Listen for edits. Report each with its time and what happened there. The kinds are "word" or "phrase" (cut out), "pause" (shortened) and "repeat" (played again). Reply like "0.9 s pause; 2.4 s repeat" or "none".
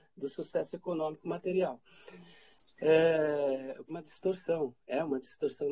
3.9 s word